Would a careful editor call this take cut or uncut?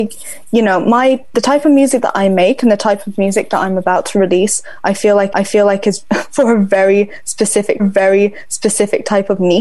cut